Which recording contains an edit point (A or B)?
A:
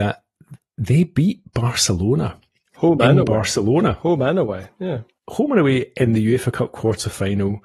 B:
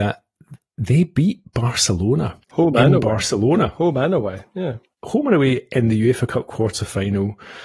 B